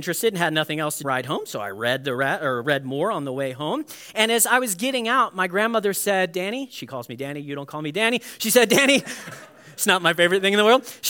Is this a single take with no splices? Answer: no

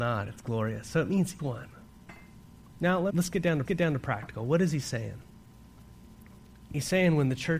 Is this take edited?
yes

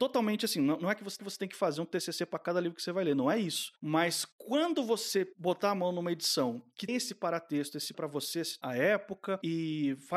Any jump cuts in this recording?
yes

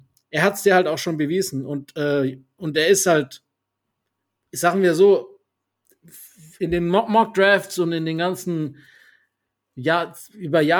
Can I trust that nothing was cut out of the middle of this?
yes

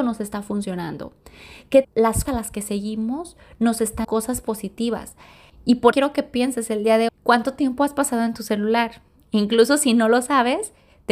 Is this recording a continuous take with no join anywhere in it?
no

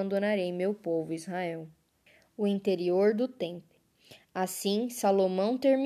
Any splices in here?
yes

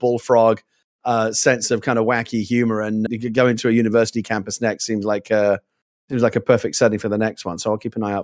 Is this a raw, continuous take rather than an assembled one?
no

